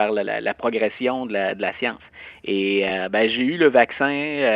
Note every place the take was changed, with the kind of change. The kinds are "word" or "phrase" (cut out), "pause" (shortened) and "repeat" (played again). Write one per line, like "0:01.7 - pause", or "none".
none